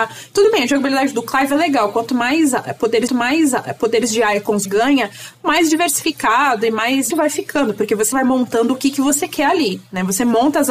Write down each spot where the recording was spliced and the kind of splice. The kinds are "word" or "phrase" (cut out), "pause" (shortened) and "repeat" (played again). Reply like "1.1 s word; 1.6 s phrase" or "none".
3.1 s repeat; 4.7 s word; 7.1 s word; 8.1 s word